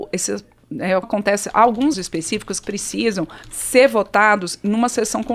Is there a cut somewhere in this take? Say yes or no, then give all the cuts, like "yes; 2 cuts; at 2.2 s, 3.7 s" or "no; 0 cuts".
yes; 4 cuts; at 1.0 s, 1.9 s, 2.6 s, 3.4 s